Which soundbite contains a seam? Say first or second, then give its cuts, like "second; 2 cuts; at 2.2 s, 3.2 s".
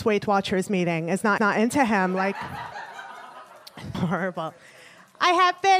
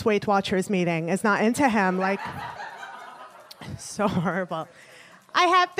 first; 2 cuts; at 1.4 s, 3.9 s